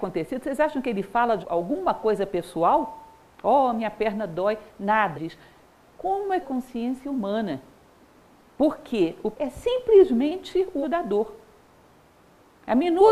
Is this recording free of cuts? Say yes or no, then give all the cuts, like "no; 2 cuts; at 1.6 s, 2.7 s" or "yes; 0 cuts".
no; 5 cuts; at 1.4 s, 5.1 s, 6.4 s, 9.3 s, 10.8 s